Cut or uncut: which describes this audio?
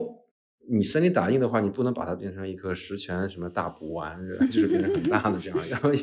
uncut